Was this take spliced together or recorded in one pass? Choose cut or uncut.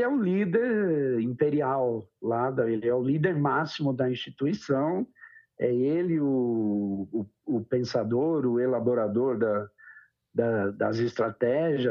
uncut